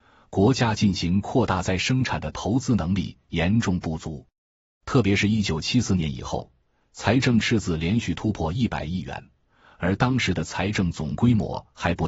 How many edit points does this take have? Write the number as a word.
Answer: zero